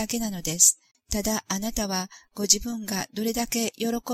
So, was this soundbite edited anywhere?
yes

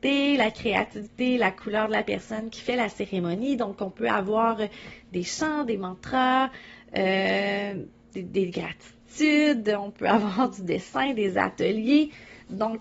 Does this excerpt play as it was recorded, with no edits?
yes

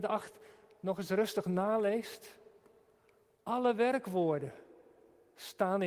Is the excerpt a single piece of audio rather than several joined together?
yes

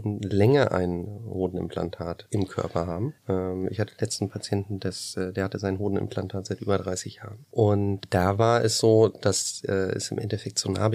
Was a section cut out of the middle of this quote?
yes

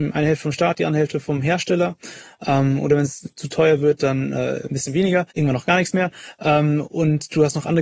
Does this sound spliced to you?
yes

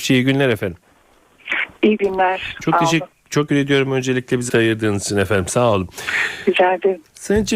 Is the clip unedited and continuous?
no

